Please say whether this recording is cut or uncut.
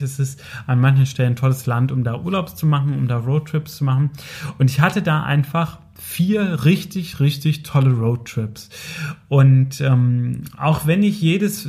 uncut